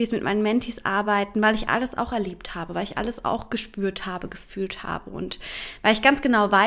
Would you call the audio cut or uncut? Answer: uncut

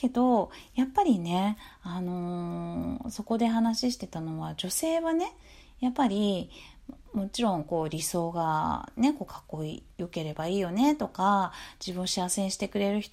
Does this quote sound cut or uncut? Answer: uncut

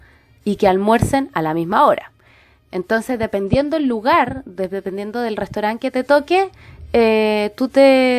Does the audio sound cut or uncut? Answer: uncut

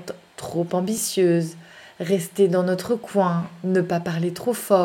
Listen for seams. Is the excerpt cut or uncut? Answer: uncut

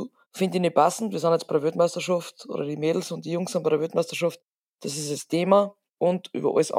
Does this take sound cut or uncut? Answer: uncut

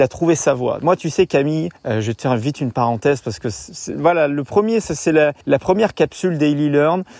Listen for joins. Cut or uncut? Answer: cut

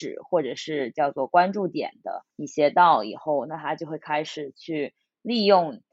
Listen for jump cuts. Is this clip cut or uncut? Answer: cut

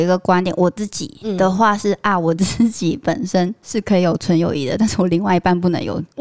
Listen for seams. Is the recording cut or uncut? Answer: uncut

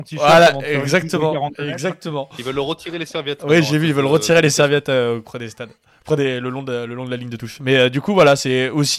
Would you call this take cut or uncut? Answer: uncut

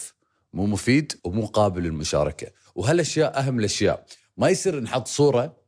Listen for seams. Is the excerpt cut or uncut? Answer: cut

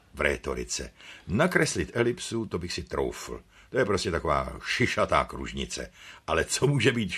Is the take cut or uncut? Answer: uncut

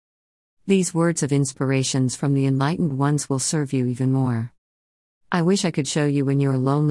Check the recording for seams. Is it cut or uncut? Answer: uncut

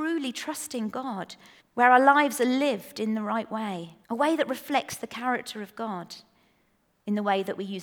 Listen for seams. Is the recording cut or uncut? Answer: cut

